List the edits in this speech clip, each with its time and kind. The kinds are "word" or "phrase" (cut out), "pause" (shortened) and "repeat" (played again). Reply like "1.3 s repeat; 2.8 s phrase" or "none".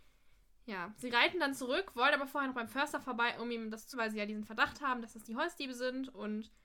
3.9 s word